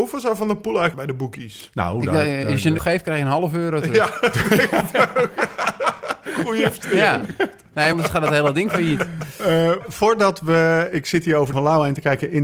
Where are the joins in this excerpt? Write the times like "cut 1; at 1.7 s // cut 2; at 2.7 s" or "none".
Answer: cut 1; at 0.9 s // cut 2; at 2.8 s // cut 3; at 7.9 s // cut 4; at 9.8 s // cut 5; at 11.0 s // cut 6; at 11.5 s